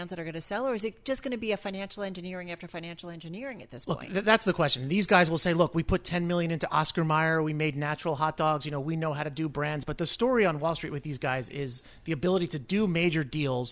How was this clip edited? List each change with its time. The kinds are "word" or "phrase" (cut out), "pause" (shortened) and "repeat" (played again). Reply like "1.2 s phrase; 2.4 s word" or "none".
none